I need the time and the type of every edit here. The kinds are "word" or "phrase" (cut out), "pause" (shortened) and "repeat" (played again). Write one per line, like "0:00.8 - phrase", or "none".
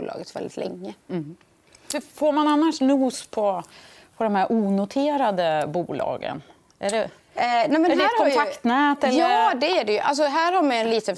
none